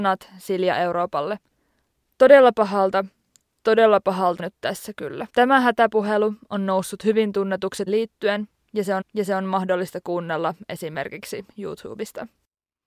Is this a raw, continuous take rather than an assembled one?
no; 4 cuts; at 4.4 s, 5.3 s, 7.9 s, 9.0 s

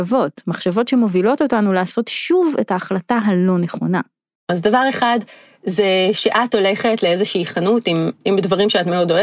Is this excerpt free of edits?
yes; 0 cuts

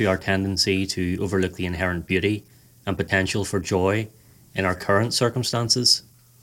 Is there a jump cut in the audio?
no; 0 cuts

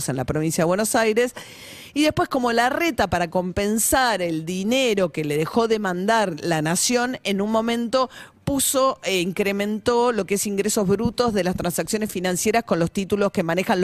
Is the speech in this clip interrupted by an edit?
no; 0 cuts

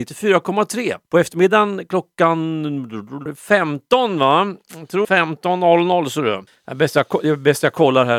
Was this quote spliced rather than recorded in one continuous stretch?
yes; 4 cuts; at 1.0 s, 3.3 s, 5.0 s, 6.5 s

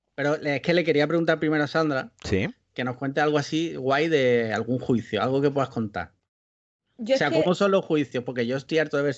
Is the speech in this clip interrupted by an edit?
no; 0 cuts

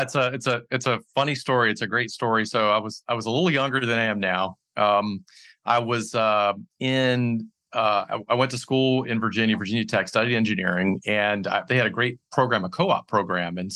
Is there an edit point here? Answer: no; 0 cuts

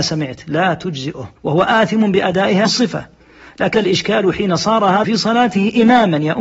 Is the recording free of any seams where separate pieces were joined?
no; 4 cuts; at 1.4 s, 2.6 s, 3.7 s, 5.0 s

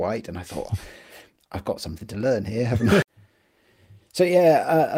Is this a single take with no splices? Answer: yes; 0 cuts

